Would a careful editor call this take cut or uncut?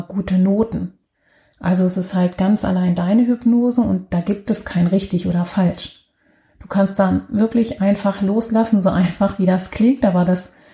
uncut